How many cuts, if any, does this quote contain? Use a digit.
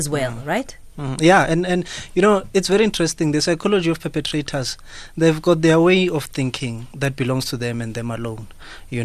0